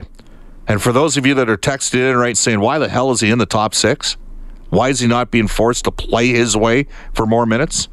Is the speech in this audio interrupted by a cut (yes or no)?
yes